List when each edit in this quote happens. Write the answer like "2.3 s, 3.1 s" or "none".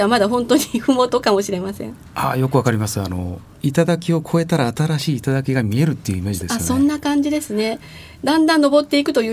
3.5 s